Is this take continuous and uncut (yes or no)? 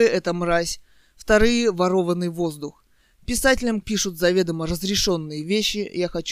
no